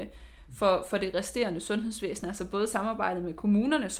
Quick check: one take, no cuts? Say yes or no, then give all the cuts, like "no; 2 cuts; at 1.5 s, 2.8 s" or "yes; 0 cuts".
yes; 0 cuts